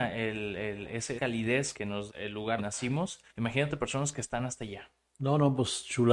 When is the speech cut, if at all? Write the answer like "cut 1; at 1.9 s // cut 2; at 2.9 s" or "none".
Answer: cut 1; at 1.2 s // cut 2; at 1.7 s // cut 3; at 2.1 s // cut 4; at 2.6 s // cut 5; at 3.3 s